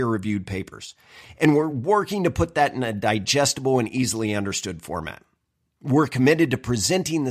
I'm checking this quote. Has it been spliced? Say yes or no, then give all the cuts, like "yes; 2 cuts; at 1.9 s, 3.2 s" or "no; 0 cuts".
no; 0 cuts